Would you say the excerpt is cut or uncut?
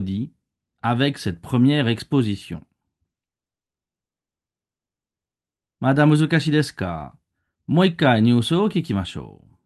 uncut